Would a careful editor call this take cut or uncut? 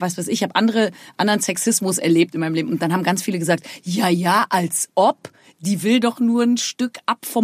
uncut